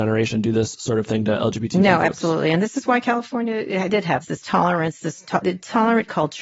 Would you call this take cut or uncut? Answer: cut